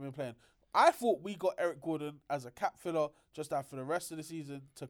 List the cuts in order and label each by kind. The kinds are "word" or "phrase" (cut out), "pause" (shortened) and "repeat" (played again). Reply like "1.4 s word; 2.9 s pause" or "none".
none